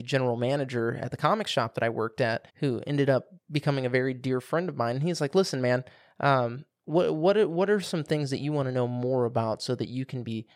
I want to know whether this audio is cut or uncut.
cut